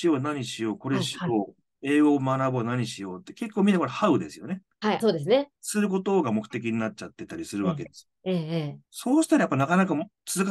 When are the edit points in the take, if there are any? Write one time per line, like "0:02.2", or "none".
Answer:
0:05.0
0:05.6
0:08.9